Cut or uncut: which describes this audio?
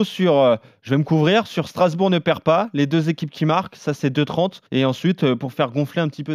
cut